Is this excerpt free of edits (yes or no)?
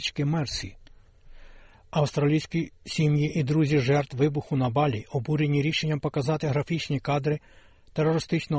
yes